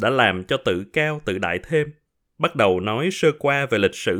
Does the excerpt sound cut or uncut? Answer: uncut